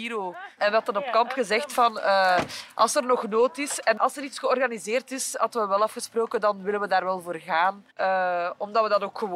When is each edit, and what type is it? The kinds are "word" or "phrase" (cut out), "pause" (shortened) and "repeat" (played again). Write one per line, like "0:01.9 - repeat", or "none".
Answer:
0:07.9 - pause